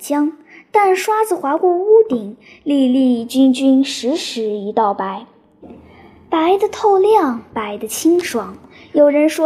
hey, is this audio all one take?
yes; 0 cuts

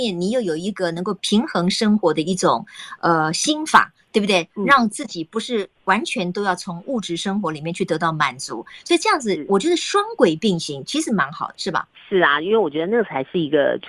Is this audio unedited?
no; 1 cut; at 11.5 s

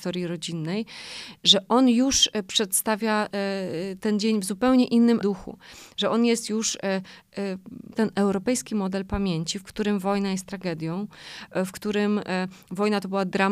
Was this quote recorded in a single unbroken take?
no; 2 cuts; at 5.2 s, 8.0 s

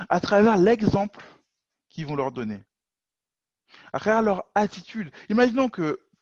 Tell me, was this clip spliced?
no; 0 cuts

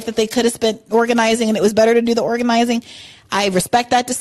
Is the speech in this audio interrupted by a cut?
no; 0 cuts

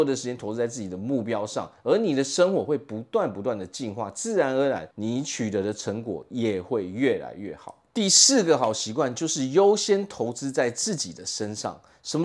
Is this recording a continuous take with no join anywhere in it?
no; 1 cut; at 4.9 s

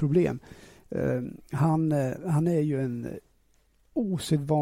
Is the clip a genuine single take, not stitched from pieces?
yes; 0 cuts

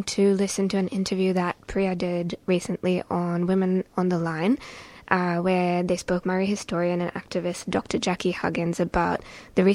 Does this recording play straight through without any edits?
no; 2 cuts; at 2.4 s, 6.2 s

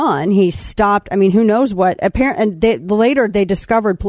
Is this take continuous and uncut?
yes; 0 cuts

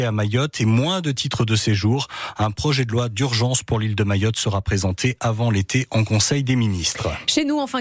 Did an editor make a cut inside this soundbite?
no; 0 cuts

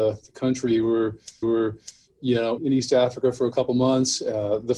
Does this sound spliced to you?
yes; 2 cuts; at 1.4 s, 2.6 s

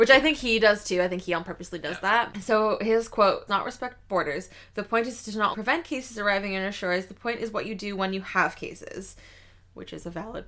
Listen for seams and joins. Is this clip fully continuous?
no; 2 cuts; at 3.5 s, 5.5 s

